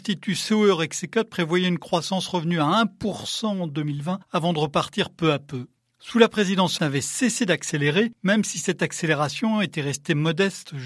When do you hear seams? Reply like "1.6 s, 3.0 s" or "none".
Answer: 6.8 s